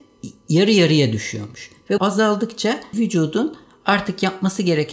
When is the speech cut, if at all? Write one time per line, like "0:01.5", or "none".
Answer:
0:02.0
0:02.9